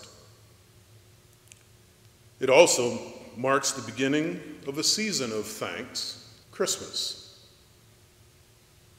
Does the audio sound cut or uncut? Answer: cut